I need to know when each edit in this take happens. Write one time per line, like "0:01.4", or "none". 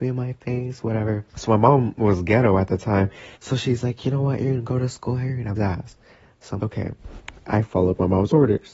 0:01.3
0:03.3
0:05.6
0:06.6